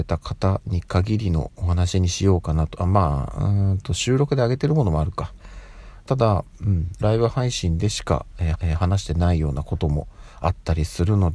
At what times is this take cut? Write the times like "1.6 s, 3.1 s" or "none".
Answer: 7.0 s, 8.5 s